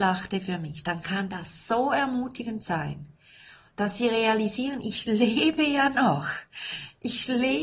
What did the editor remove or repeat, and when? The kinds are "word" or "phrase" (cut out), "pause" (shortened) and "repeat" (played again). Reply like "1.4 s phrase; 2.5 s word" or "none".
none